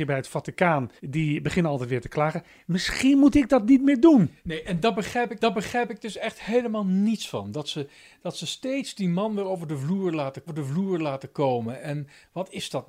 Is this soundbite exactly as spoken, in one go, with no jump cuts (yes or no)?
no